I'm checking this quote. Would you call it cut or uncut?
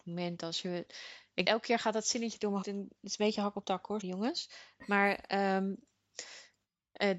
cut